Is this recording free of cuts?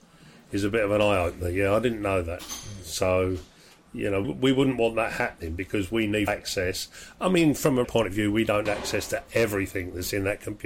no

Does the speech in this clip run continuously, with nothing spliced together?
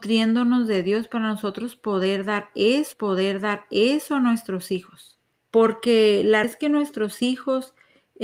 no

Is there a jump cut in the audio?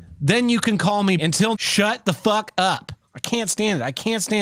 yes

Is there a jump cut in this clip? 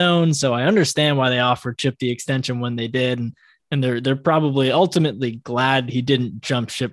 no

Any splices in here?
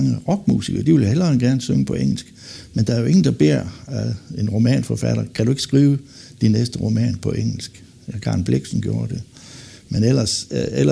no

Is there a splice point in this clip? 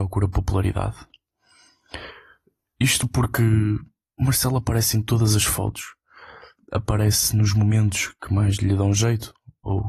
yes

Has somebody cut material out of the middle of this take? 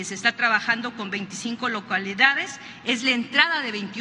no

